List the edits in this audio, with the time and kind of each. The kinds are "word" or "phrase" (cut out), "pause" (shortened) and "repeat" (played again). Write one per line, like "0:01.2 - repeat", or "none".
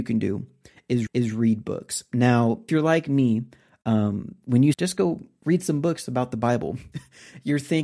0:01.1 - repeat
0:02.7 - word
0:04.7 - phrase

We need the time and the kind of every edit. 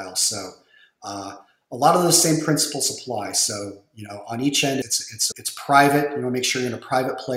0:04.8 - word
0:05.3 - word

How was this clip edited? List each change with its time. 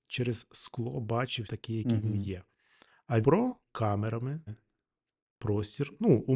0:01.5 - word
0:03.2 - word
0:03.7 - word
0:04.5 - word

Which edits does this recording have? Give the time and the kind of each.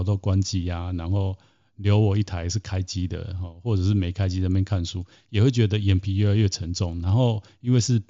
none

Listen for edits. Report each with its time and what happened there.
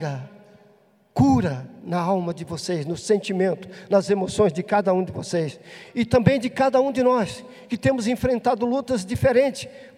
none

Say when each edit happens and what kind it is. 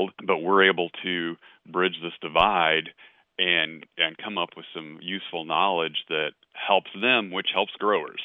none

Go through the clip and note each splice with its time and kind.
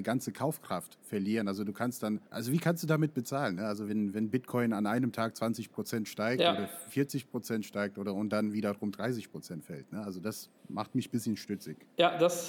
0:02.3 - pause
0:03.9 - word
0:10.6 - pause

